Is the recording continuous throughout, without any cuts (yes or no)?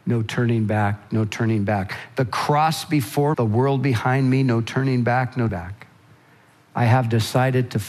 no